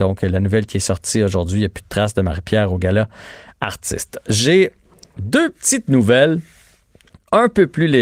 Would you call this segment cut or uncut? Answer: uncut